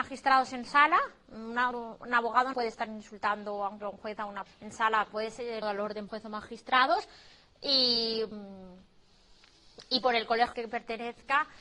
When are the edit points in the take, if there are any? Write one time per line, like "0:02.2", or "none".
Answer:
0:01.7
0:02.5
0:03.8
0:04.5
0:05.6
0:06.1
0:10.5